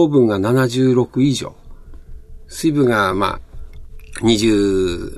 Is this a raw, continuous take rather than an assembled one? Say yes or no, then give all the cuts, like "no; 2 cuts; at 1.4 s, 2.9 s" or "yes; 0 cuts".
yes; 0 cuts